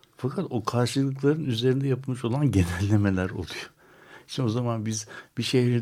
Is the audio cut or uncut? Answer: uncut